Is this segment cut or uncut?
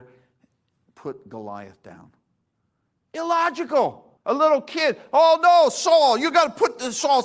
cut